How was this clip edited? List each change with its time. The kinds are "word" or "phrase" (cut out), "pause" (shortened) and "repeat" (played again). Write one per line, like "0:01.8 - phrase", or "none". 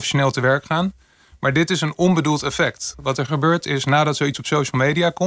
none